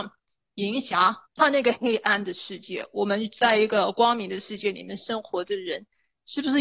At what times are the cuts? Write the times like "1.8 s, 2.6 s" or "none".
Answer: 1.3 s